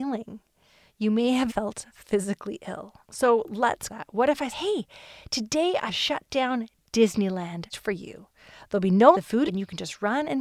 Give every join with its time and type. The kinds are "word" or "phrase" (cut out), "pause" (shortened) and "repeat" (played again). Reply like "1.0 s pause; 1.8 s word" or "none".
1.5 s word; 3.0 s pause; 3.9 s word; 4.5 s word; 5.9 s word; 7.7 s word; 9.1 s word; 9.5 s phrase